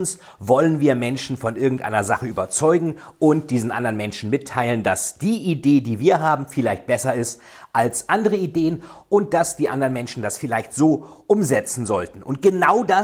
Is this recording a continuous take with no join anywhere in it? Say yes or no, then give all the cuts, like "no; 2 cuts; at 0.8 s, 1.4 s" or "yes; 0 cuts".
yes; 0 cuts